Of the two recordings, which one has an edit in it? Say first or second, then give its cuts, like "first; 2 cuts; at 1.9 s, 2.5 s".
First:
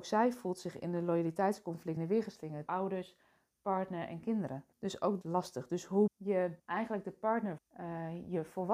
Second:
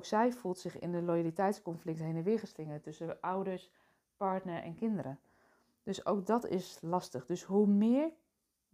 first; 7 cuts; at 2.0 s, 2.7 s, 4.7 s, 5.2 s, 6.1 s, 6.6 s, 7.6 s